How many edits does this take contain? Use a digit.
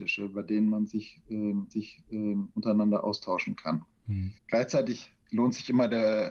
2